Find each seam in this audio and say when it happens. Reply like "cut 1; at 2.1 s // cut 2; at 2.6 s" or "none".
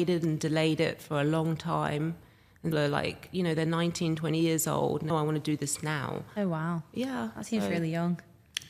cut 1; at 2.7 s // cut 2; at 5.1 s